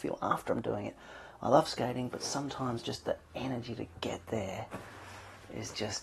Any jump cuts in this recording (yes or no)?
no